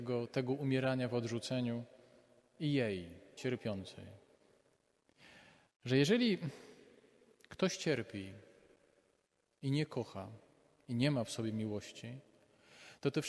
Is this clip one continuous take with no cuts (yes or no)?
no